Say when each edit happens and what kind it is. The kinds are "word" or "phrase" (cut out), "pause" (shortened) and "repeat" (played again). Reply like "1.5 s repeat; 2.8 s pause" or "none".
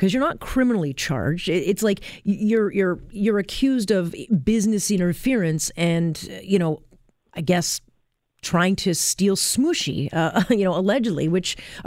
none